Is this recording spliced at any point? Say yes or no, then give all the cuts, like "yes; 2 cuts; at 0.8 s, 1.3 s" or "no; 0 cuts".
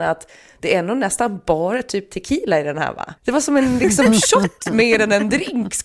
yes; 1 cut; at 3.2 s